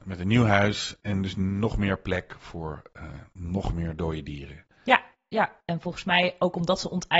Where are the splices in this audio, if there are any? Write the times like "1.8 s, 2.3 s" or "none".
none

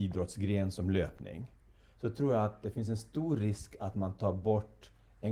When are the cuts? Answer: none

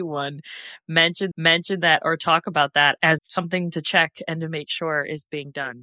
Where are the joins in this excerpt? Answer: 1.3 s, 3.2 s

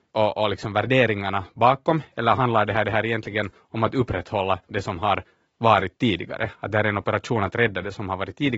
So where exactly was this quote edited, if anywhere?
2.8 s

